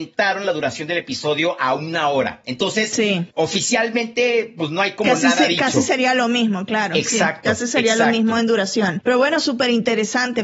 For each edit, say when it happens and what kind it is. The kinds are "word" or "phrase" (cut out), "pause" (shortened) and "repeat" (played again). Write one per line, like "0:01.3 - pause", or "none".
0:03.3 - pause